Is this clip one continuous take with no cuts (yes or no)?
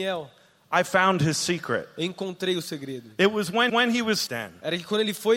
no